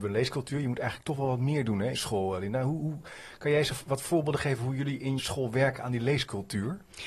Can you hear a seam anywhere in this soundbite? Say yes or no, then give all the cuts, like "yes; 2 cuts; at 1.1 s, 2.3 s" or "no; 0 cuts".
yes; 2 cuts; at 1.9 s, 5.2 s